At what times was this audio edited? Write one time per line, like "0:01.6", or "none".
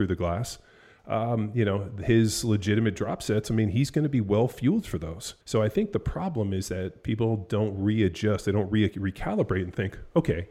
0:05.4